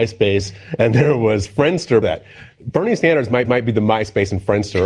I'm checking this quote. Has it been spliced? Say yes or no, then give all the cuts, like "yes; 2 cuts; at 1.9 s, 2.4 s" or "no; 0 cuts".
yes; 2 cuts; at 2.0 s, 3.5 s